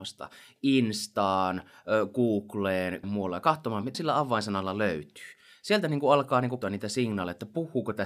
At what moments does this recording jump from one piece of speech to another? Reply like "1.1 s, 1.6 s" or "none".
3.0 s, 3.9 s, 6.6 s